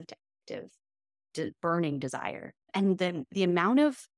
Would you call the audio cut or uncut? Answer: cut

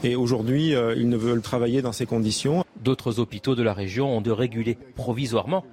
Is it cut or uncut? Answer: cut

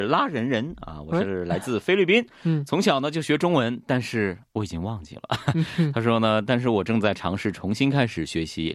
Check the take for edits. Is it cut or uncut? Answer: uncut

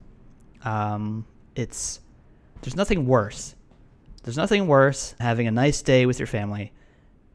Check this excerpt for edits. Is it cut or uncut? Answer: cut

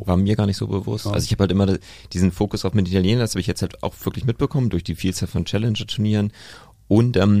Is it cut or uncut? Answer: uncut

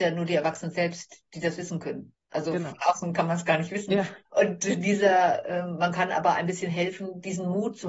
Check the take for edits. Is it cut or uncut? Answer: cut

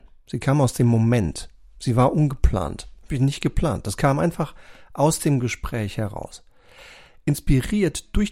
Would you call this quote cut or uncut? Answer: uncut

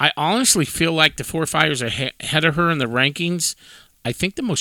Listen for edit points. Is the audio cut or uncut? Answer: uncut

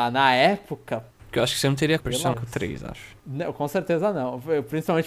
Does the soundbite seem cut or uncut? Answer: cut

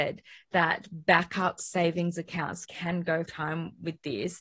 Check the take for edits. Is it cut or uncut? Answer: cut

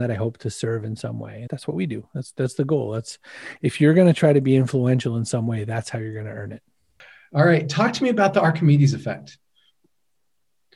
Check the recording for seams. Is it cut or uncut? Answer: cut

